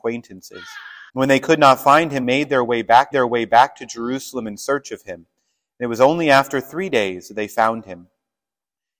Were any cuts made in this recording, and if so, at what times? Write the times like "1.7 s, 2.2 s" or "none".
1.1 s, 2.2 s, 3.1 s